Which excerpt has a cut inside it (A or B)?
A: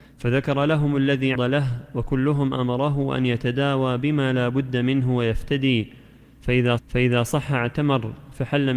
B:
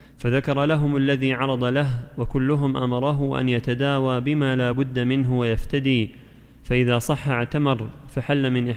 A